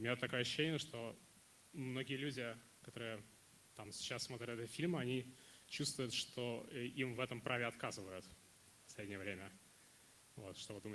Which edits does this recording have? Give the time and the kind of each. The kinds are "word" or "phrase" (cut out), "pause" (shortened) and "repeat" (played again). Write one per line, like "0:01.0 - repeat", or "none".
none